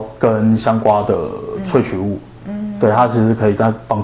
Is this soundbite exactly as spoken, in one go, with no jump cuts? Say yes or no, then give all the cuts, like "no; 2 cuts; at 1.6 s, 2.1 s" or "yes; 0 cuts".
yes; 0 cuts